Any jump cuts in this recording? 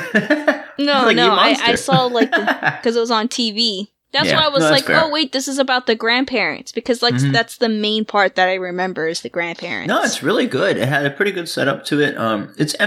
no; 0 cuts

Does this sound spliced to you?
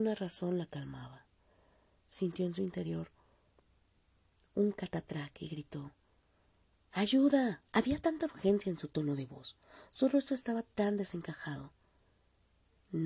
yes; 1 cut; at 7.7 s

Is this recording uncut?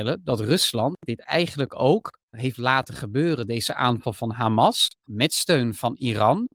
no; 2 cuts; at 2.3 s, 4.9 s

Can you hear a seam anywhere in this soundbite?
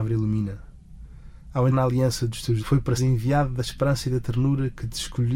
yes; 3 cuts; at 1.7 s, 2.6 s, 3.0 s

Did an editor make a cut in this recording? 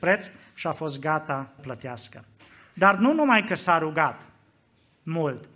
yes; 1 cut; at 1.6 s

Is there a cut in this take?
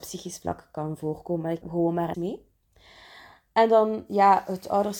yes; 2 cuts; at 1.6 s, 2.1 s

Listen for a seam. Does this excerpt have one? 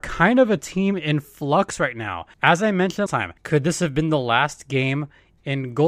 yes; 3 cuts; at 2.3 s, 3.1 s, 3.4 s

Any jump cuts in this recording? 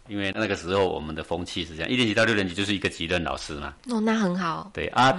yes; 1 cut; at 3.8 s

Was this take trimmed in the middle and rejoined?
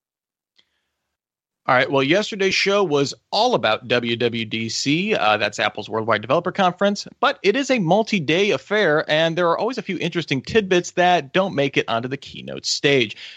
no; 0 cuts

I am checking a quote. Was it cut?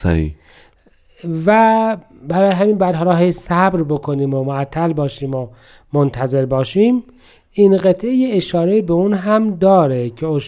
no; 0 cuts

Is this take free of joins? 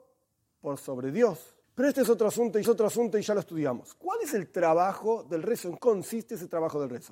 no; 3 cuts; at 1.6 s, 2.6 s, 5.8 s

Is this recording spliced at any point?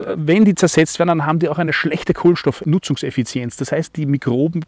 no; 0 cuts

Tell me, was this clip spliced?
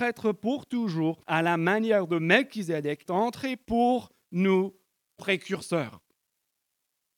yes; 3 cuts; at 1.2 s, 3.1 s, 5.2 s

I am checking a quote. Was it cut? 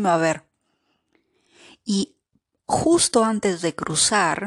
no; 0 cuts

